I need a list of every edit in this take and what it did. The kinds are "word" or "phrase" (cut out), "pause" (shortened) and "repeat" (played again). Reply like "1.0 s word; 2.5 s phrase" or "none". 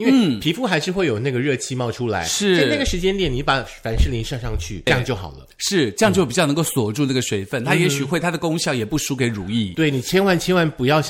4.9 s word